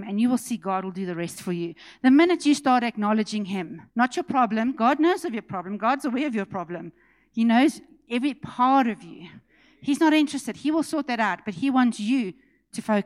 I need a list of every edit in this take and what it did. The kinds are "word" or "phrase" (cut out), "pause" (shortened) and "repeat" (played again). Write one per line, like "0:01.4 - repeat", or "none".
0:03.9 - pause